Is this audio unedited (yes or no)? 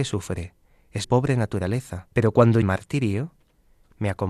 no